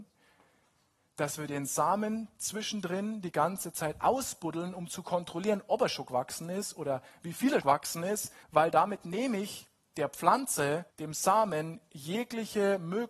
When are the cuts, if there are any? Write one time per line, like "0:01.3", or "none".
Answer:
0:07.6
0:08.4
0:10.9